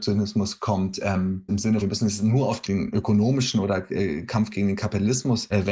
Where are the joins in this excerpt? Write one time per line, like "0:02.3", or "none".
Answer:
0:01.5
0:01.8